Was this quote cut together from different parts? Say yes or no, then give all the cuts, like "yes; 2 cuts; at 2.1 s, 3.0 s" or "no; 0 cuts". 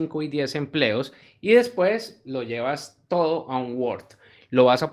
no; 0 cuts